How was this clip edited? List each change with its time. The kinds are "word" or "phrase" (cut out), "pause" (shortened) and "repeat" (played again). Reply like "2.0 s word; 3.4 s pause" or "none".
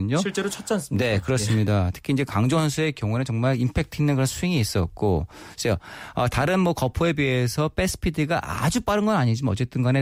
none